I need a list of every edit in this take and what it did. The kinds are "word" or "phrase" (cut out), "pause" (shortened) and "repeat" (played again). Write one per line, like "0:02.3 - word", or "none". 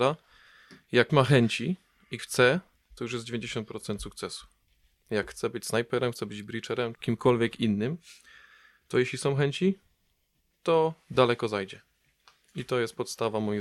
0:01.1 - word
0:02.2 - word
0:06.9 - word